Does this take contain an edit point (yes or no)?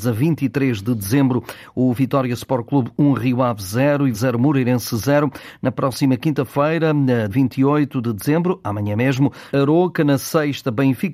yes